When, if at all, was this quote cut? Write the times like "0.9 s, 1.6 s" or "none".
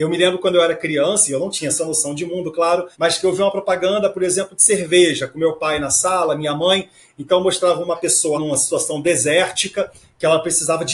2.9 s, 8.3 s